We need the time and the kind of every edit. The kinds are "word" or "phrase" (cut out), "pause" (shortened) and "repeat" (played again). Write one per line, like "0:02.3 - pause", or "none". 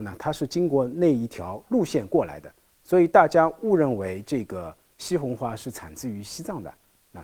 none